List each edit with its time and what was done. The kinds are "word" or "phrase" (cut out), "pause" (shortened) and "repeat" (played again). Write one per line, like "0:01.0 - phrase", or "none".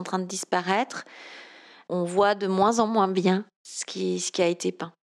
none